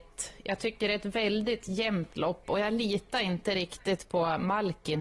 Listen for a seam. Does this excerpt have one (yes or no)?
no